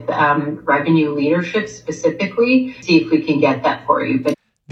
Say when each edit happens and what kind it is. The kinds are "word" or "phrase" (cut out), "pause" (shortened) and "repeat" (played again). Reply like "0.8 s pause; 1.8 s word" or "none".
none